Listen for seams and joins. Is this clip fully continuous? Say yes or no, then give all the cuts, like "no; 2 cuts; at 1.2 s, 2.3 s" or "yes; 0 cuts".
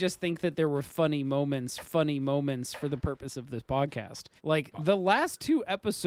no; 2 cuts; at 1.8 s, 4.4 s